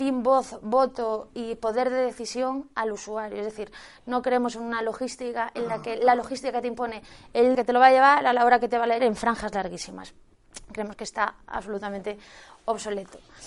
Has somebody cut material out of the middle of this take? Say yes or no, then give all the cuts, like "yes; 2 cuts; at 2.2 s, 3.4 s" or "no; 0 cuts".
yes; 2 cuts; at 7.5 s, 9.0 s